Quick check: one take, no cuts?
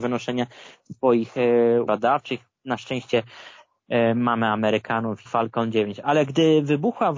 no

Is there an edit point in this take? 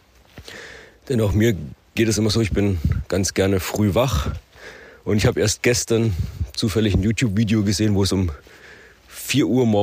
no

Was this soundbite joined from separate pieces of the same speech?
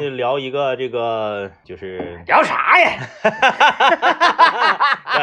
yes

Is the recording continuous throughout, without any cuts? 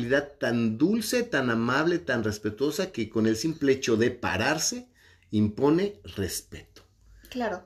yes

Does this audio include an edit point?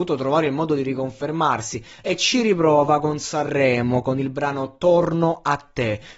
no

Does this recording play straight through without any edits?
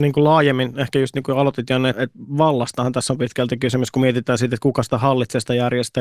no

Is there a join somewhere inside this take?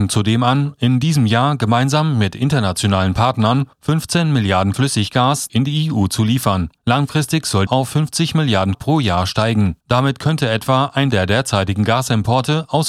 yes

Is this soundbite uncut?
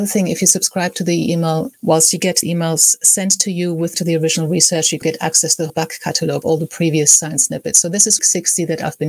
no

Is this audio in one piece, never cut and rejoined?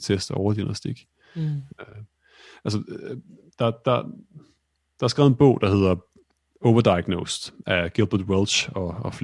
yes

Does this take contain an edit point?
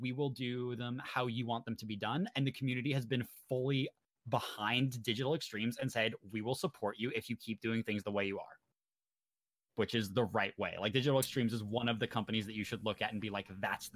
no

